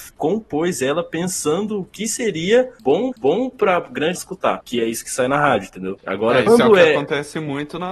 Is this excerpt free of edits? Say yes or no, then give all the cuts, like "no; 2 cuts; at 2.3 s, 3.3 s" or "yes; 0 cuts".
no; 3 cuts; at 3.1 s, 4.2 s, 6.5 s